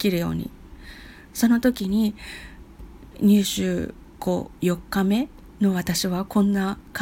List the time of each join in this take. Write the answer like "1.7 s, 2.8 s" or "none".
5.5 s